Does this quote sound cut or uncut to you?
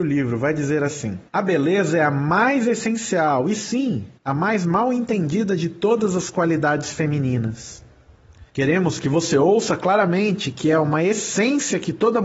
cut